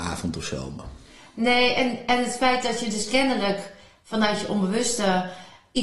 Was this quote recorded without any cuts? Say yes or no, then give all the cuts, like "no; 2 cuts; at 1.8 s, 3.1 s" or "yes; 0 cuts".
yes; 0 cuts